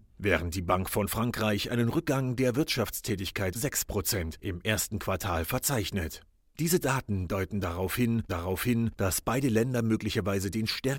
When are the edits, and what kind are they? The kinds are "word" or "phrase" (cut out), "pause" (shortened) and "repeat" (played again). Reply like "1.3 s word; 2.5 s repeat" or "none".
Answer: 3.5 s word; 8.3 s repeat